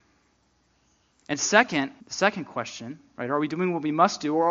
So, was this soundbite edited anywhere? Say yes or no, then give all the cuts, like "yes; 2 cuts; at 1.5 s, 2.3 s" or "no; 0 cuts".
yes; 1 cut; at 2.0 s